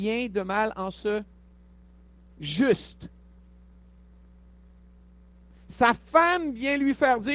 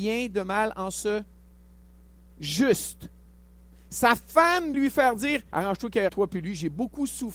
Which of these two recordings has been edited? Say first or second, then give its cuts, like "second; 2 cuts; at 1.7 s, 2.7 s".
second; 4 cuts; at 3.3 s, 4.7 s, 5.5 s, 6.1 s